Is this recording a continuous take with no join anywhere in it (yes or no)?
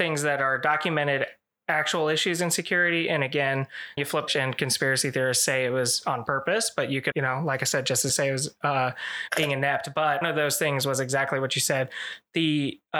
no